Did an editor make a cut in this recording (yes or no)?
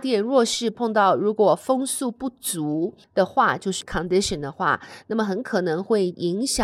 yes